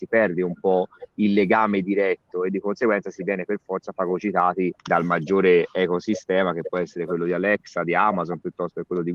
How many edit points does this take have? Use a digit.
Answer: 1